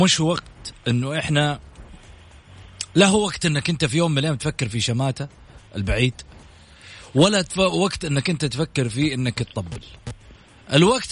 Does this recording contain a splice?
no; 0 cuts

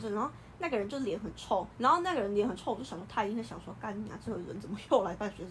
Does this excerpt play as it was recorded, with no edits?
no; 1 cut; at 1.7 s

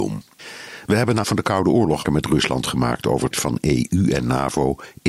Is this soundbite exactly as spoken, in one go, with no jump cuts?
no; 3 cuts; at 1.2 s, 2.1 s, 3.3 s

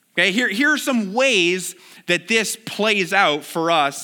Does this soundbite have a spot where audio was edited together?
no; 0 cuts

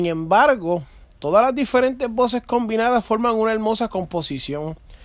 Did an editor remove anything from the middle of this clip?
no; 0 cuts

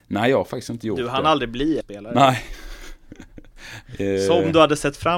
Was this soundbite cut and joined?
yes; 1 cut; at 1.8 s

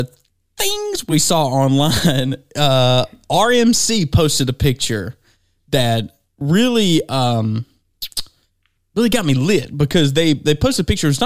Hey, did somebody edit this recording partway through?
no; 0 cuts

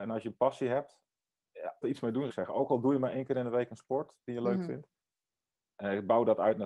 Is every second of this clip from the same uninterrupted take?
no; 2 cuts; at 1.8 s, 2.3 s

